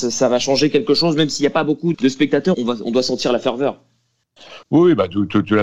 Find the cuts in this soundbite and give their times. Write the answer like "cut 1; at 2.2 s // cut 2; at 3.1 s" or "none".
cut 1; at 1.9 s // cut 2; at 2.5 s // cut 3; at 4.6 s